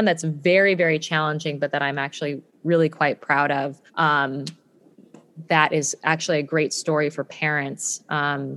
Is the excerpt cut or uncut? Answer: cut